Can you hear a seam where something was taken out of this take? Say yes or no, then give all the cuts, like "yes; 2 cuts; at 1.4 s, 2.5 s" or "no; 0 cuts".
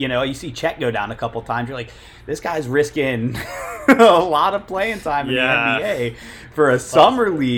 no; 0 cuts